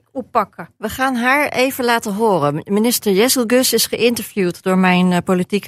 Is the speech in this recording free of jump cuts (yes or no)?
yes